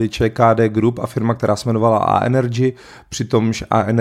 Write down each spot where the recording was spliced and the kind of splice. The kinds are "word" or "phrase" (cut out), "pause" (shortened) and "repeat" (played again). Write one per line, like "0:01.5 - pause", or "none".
none